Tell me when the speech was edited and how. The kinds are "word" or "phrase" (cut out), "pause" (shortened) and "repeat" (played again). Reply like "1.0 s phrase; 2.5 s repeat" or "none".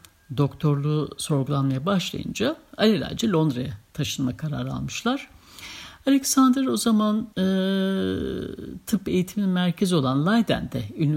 7.3 s pause